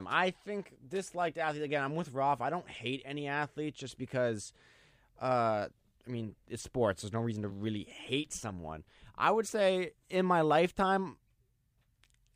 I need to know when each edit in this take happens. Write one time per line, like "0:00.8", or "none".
none